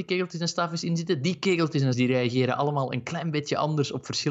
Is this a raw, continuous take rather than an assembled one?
no; 1 cut; at 1.9 s

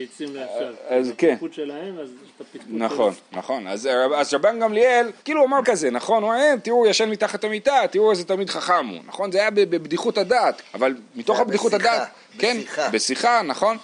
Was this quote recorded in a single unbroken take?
no; 3 cuts; at 5.2 s, 5.6 s, 10.6 s

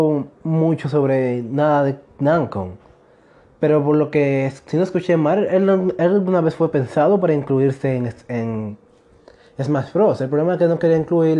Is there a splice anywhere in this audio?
no; 0 cuts

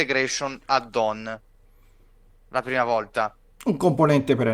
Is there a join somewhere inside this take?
no; 0 cuts

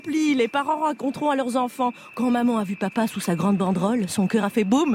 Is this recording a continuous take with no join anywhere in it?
yes; 0 cuts

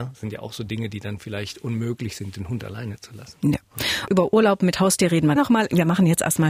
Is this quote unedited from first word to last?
no; 1 cut; at 5.4 s

